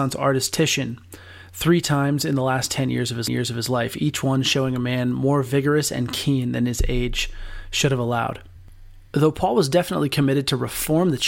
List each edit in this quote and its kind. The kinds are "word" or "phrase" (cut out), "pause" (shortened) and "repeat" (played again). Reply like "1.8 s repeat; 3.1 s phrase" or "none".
3.3 s repeat; 9.1 s pause

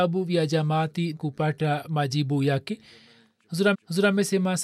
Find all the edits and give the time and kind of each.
1.2 s word; 3.7 s repeat

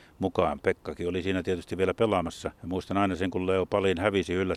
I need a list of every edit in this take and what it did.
2.6 s pause

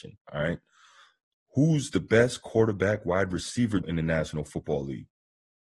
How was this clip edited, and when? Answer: 3.8 s word

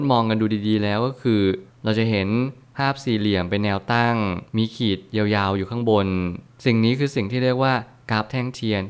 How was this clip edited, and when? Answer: 4.5 s pause

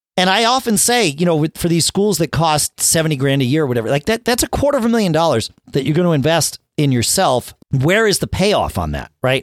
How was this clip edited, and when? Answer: 7.6 s pause

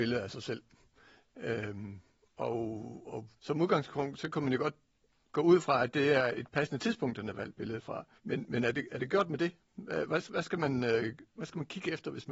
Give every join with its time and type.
3.4 s pause; 8.2 s pause

